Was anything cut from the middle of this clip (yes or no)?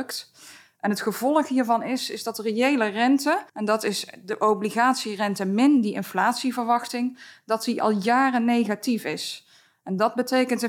yes